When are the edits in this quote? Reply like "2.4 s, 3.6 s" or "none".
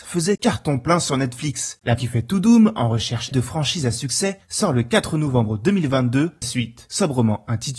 2.0 s, 3.3 s, 6.4 s

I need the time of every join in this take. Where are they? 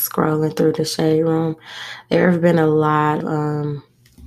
3.2 s

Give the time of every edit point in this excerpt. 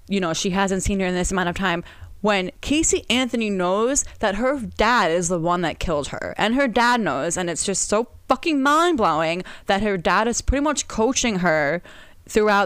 none

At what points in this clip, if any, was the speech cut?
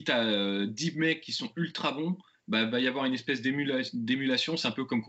none

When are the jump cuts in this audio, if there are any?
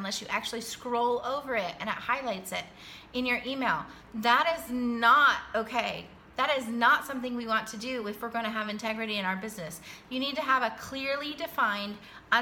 none

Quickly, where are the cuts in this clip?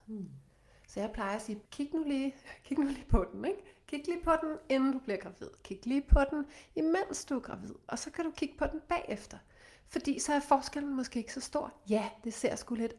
1.7 s

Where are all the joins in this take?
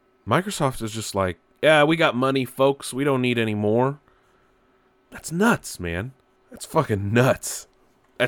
none

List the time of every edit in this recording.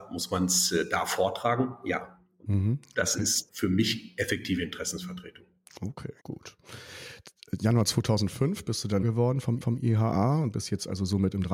3.5 s, 6.2 s, 9.0 s, 9.6 s

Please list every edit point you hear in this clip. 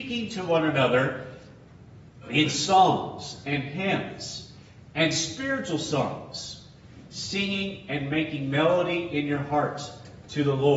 none

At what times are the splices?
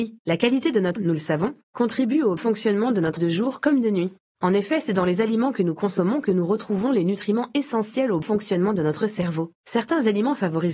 1.0 s, 2.4 s, 3.2 s, 8.2 s

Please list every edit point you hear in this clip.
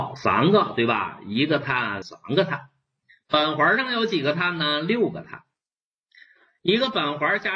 2.0 s

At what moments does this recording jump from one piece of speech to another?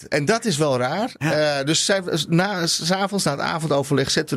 none

